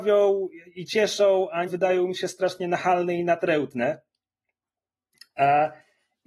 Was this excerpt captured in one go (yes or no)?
no